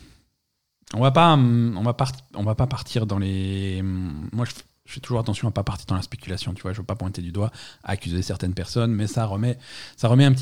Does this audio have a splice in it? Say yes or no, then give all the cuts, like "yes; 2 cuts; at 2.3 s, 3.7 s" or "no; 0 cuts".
no; 0 cuts